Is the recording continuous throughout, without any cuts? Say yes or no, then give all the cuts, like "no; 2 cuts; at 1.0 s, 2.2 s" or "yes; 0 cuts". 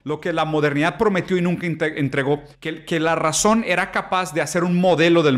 no; 1 cut; at 2.5 s